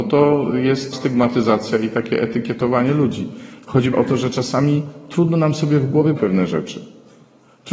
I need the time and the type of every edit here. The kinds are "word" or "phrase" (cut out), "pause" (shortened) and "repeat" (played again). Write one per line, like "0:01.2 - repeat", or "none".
0:00.9 - word
0:03.9 - word
0:06.2 - word